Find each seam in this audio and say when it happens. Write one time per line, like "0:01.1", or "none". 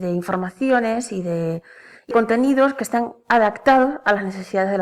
0:02.1